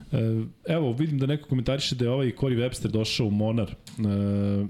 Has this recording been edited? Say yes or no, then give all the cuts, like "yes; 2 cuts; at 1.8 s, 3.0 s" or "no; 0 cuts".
no; 0 cuts